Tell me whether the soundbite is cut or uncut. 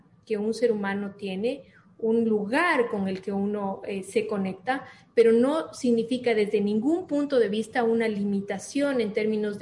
uncut